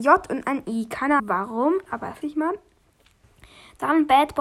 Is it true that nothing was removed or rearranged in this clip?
no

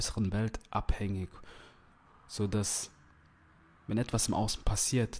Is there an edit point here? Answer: no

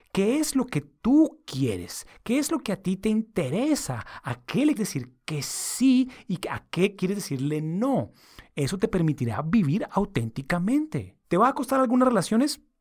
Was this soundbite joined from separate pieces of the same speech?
yes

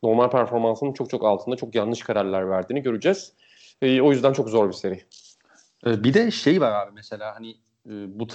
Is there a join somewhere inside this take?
no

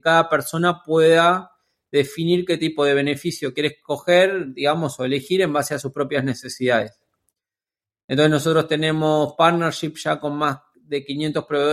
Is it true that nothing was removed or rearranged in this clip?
yes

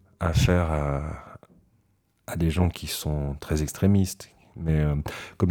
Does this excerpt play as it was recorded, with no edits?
yes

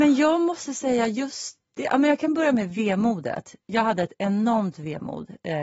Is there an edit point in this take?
no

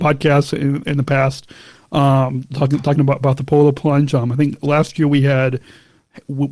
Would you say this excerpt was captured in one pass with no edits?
yes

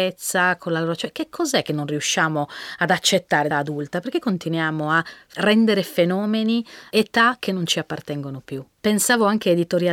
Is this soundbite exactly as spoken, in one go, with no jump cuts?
no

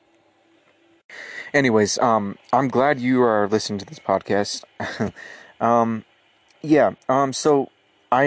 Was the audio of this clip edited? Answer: no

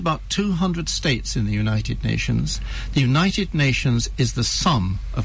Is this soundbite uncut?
yes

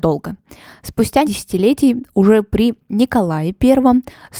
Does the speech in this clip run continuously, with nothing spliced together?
no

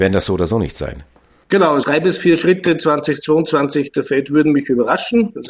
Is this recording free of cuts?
yes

